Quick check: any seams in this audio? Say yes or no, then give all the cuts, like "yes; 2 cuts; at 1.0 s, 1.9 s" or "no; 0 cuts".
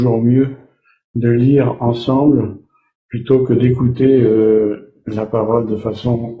no; 0 cuts